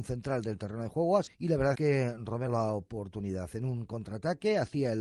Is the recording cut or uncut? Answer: cut